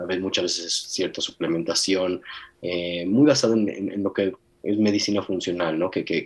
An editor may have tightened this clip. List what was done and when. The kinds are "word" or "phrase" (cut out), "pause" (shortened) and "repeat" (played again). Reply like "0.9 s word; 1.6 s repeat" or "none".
none